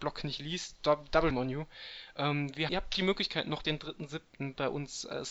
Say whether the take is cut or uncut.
cut